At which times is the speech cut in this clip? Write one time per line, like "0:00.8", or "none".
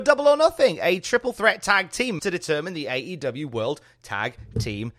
0:02.2